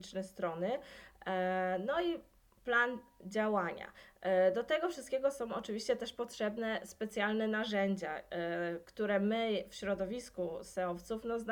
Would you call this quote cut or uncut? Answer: uncut